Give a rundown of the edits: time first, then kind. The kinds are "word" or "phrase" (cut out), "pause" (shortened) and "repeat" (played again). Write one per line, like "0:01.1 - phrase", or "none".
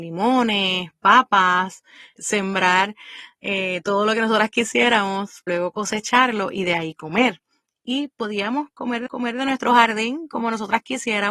0:02.2 - word
0:05.5 - word
0:09.1 - repeat